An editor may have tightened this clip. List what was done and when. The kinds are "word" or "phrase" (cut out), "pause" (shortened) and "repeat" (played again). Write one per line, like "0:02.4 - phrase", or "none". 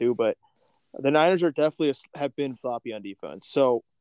0:02.6 - word